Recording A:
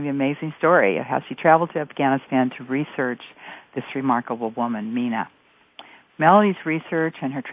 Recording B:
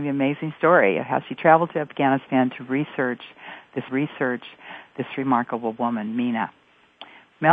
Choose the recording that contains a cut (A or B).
B